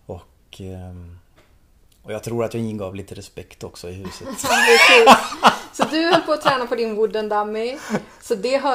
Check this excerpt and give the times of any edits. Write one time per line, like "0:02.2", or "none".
none